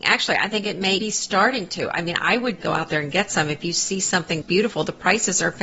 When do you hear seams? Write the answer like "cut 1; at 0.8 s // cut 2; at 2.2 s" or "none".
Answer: cut 1; at 1.0 s // cut 2; at 2.6 s // cut 3; at 4.4 s